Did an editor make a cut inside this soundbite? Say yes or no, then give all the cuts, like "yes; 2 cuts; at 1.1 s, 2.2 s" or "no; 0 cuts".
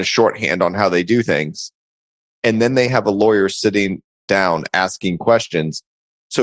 no; 0 cuts